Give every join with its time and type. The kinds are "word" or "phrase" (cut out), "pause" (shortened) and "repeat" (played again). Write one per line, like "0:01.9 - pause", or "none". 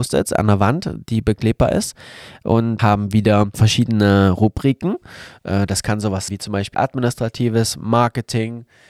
0:02.8 - word
0:03.5 - word
0:06.3 - word
0:06.7 - word